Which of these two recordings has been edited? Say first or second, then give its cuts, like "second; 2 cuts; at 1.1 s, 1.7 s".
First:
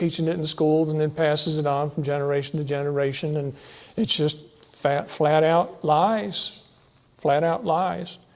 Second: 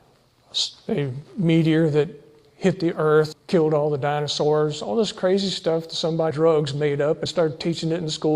second; 3 cuts; at 3.3 s, 6.3 s, 7.3 s